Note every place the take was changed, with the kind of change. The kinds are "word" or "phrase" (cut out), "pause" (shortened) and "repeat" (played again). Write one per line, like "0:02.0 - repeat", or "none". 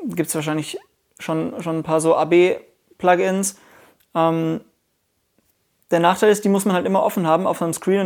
none